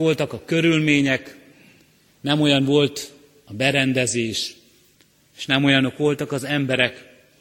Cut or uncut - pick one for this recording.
uncut